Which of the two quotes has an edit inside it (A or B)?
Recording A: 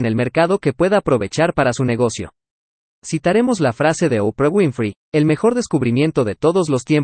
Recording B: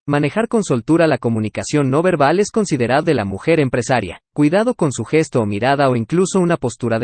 B